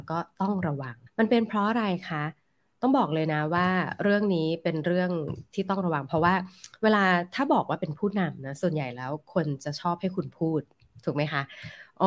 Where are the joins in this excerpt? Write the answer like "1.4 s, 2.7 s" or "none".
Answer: 1.1 s